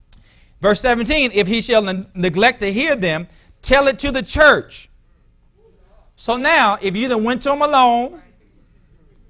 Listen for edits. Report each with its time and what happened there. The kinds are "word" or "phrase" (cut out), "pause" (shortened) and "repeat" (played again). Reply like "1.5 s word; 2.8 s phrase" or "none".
none